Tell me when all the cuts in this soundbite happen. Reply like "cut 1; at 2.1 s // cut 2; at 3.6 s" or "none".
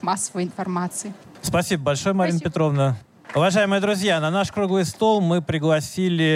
cut 1; at 1.3 s